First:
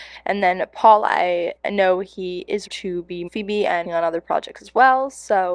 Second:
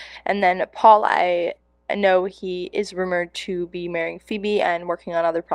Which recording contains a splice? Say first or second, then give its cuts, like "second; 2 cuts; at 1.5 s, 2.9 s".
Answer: first; 4 cuts; at 1.6 s, 2.7 s, 3.3 s, 3.8 s